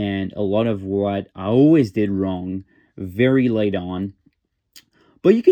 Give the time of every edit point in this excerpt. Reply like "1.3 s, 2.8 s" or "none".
none